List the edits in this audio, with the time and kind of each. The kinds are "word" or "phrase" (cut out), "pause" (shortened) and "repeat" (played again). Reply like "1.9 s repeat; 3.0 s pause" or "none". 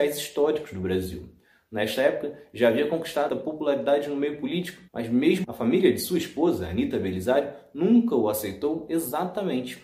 3.3 s phrase; 4.9 s pause; 5.4 s word

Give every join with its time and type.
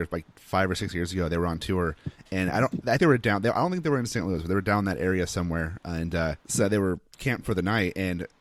3.0 s word; 6.4 s pause

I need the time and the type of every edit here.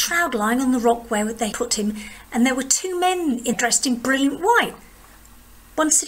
1.5 s word; 3.5 s word

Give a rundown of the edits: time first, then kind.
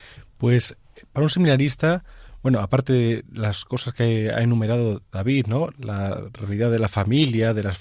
none

